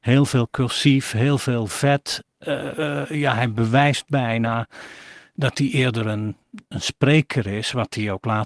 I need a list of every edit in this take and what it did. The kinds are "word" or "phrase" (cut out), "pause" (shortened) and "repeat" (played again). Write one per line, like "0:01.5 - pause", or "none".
0:06.6 - pause

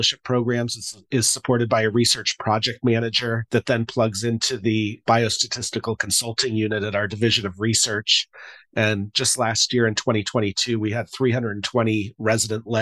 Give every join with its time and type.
0:03.5 - pause

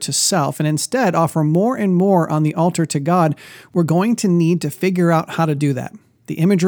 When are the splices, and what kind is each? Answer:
none

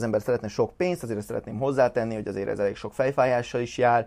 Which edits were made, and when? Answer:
none

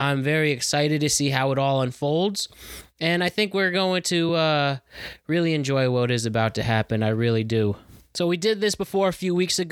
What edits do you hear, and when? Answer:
none

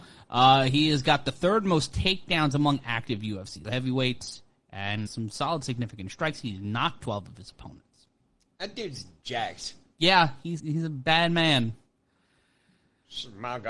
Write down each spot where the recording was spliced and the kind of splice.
0:03.6 - word
0:05.1 - word
0:07.0 - word
0:10.6 - word

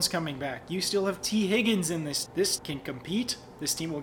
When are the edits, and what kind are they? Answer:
0:02.3 - word
0:02.6 - word

